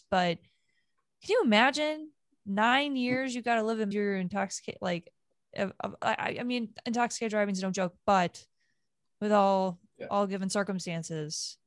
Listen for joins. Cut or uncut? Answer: cut